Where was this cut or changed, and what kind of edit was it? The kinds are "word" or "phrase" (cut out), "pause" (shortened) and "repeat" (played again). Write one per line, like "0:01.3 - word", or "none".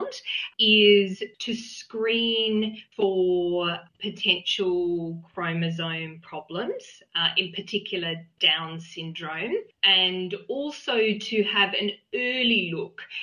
none